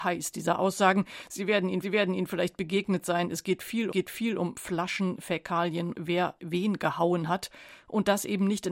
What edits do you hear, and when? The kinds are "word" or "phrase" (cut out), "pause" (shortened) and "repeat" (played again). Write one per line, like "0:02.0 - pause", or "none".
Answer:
0:01.8 - repeat
0:03.9 - repeat
0:05.9 - word
0:06.4 - word